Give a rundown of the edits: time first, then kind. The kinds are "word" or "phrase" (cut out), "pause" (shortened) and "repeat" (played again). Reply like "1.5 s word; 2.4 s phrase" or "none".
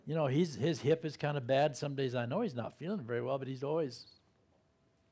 none